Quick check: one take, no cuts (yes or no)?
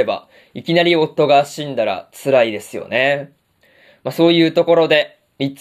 yes